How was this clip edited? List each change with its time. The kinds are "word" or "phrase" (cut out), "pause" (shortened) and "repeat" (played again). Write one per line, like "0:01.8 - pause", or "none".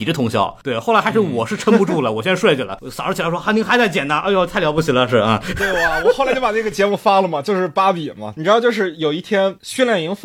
none

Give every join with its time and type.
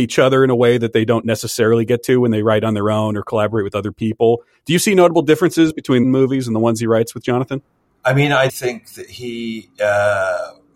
0:06.0 - phrase
0:07.9 - pause
0:08.5 - word

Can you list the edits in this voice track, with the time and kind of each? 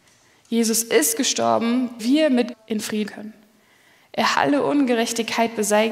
0:02.0 - word
0:02.5 - word
0:03.1 - word
0:04.3 - word

